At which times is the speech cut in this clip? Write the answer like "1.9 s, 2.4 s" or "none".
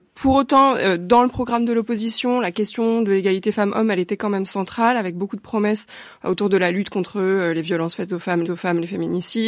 8.4 s

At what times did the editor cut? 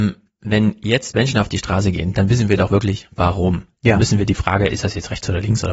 none

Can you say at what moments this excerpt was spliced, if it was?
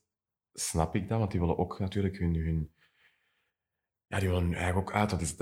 none

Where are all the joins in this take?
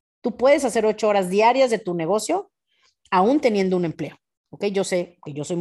none

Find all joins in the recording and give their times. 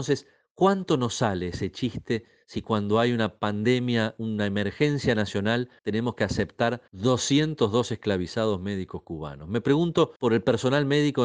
5.8 s, 6.9 s, 10.2 s

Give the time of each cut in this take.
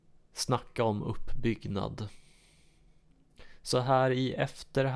none

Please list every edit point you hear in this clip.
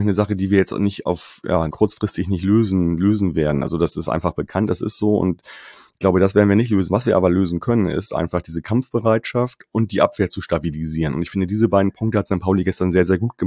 1.7 s

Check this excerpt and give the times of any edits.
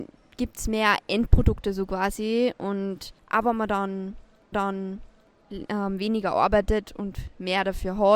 3.2 s, 4.5 s

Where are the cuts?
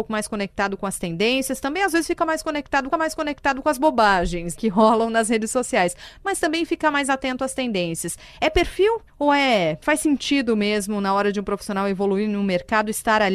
2.9 s, 4.6 s, 9.1 s, 9.8 s

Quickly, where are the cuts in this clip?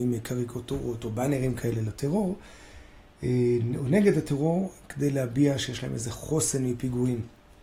none

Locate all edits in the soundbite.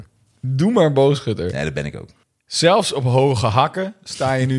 2.2 s

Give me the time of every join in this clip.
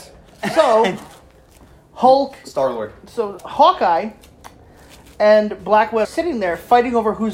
3.4 s, 6.0 s

